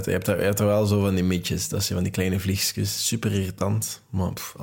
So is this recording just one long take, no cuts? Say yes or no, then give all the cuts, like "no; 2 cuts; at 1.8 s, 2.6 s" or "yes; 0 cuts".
yes; 0 cuts